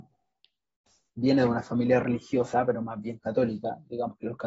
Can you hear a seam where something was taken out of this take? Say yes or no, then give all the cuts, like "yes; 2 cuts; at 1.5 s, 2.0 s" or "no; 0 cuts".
no; 0 cuts